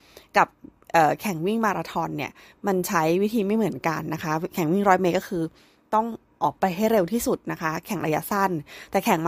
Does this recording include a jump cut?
no; 0 cuts

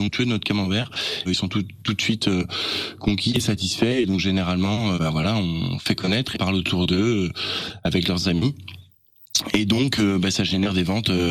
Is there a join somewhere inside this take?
yes; 3 cuts; at 1.3 s, 5.0 s, 6.3 s

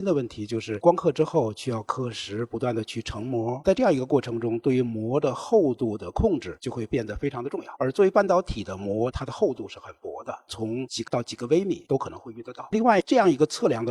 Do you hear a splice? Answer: yes; 1 cut; at 11.1 s

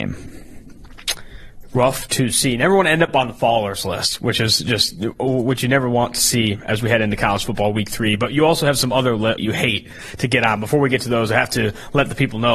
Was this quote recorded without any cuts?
no; 1 cut; at 9.4 s

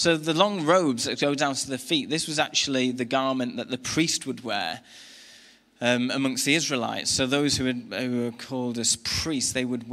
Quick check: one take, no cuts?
yes; 0 cuts

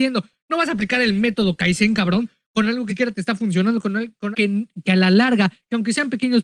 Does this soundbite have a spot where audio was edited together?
yes; 2 cuts; at 2.9 s, 4.3 s

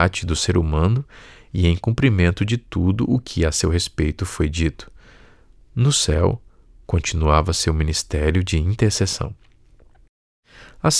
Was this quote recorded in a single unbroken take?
yes; 0 cuts

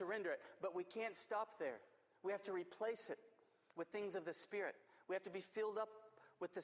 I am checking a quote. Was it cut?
no; 0 cuts

